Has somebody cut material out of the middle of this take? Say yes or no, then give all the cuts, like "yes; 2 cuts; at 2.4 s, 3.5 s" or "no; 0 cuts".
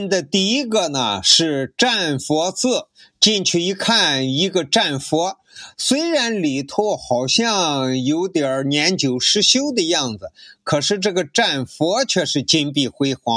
no; 0 cuts